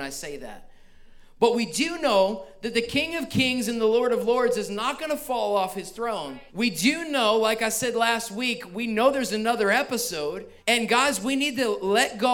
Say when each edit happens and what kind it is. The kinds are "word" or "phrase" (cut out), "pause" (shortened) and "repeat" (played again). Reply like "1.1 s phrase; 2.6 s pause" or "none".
6.5 s pause; 10.6 s pause